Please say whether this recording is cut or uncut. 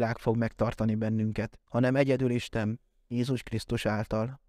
cut